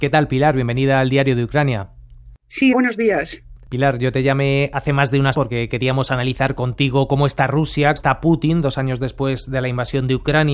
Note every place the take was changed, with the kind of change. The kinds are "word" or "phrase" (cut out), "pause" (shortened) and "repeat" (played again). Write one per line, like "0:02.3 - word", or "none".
0:02.7 - word
0:05.3 - word
0:08.0 - word